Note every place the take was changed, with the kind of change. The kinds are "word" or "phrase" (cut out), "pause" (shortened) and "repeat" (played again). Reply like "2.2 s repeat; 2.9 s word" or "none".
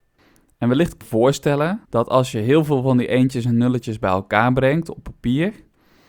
1.0 s phrase; 1.9 s pause

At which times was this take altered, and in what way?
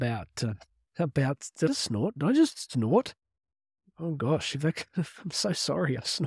1.7 s phrase

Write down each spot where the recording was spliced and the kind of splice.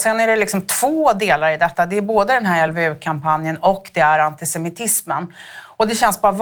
none

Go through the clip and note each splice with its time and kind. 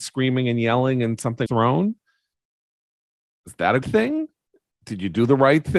1.5 s word; 3.8 s word

